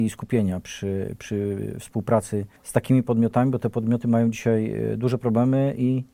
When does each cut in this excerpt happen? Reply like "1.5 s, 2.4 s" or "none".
2.6 s